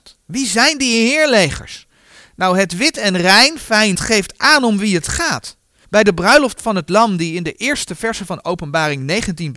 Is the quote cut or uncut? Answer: cut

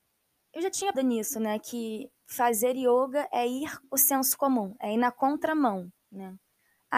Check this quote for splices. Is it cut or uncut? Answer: cut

